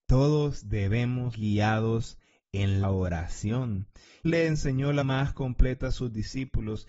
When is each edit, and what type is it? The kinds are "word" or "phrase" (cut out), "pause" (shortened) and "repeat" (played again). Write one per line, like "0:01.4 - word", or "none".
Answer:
0:01.3 - word
0:02.8 - word
0:04.2 - word
0:05.0 - word